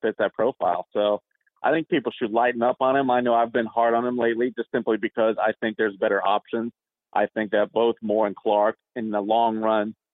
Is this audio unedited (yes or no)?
yes